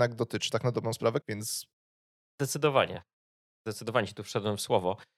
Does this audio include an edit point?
yes; 2 cuts; at 1.2 s, 3.2 s

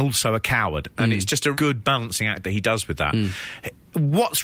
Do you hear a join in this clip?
yes; 1 cut; at 1.5 s

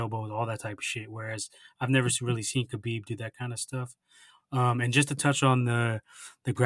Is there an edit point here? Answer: no; 0 cuts

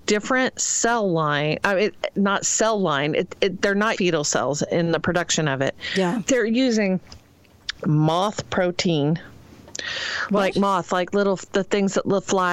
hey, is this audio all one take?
no; 1 cut; at 4.0 s

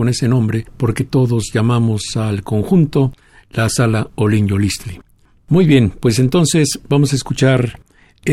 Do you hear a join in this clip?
no; 0 cuts

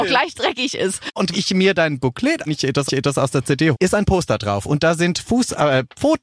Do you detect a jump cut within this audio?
yes; 4 cuts; at 1.3 s, 2.5 s, 2.9 s, 3.7 s

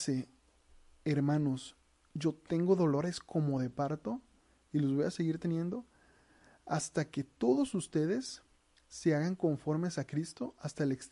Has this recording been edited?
no; 0 cuts

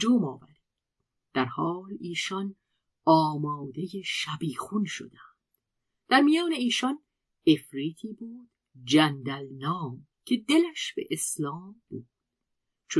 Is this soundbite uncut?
no; 2 cuts; at 10.1 s, 11.9 s

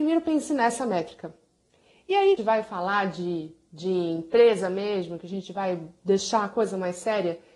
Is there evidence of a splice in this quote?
yes; 1 cut; at 2.4 s

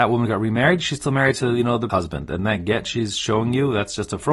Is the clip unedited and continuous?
no; 1 cut; at 1.9 s

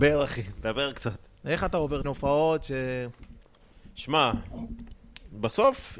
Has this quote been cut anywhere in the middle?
yes; 1 cut; at 2.0 s

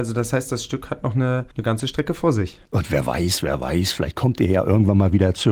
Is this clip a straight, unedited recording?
no; 1 cut; at 2.7 s

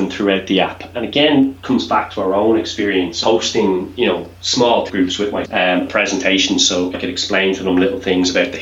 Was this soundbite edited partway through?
yes; 6 cuts; at 0.9 s, 3.2 s, 4.9 s, 5.4 s, 5.9 s, 6.9 s

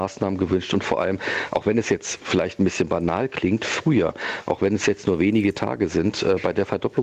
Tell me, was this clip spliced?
no; 0 cuts

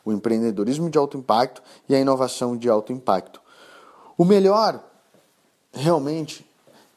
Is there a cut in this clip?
no; 0 cuts

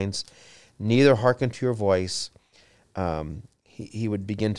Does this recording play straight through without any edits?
yes; 0 cuts

